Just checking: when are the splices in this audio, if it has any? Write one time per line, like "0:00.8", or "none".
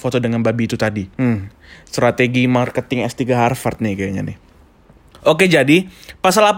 0:01.1